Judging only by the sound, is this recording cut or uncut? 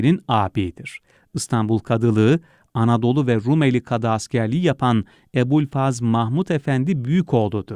uncut